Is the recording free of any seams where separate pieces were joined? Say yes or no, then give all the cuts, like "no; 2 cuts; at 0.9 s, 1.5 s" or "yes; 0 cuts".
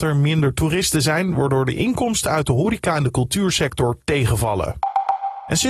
yes; 0 cuts